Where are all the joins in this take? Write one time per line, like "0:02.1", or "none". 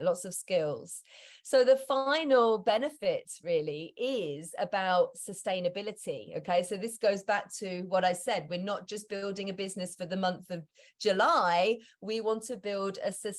none